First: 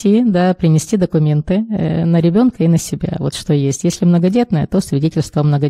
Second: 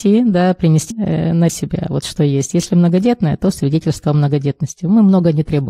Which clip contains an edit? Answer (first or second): second